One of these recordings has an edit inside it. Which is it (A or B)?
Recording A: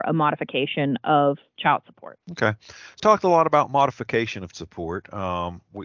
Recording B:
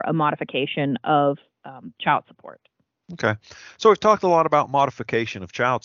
A